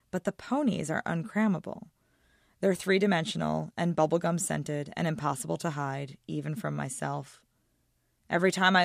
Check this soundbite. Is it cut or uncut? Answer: uncut